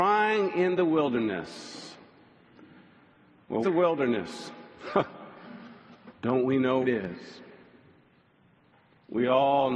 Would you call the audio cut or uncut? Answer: cut